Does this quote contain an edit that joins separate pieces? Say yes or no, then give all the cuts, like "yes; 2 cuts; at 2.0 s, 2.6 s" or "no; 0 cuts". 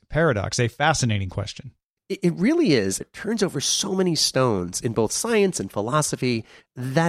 yes; 1 cut; at 3.0 s